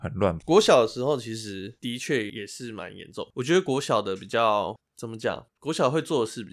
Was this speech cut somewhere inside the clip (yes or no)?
no